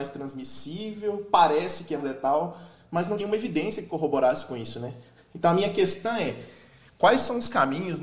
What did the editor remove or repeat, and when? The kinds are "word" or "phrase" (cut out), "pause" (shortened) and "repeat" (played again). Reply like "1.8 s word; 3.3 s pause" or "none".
2.0 s word; 3.2 s word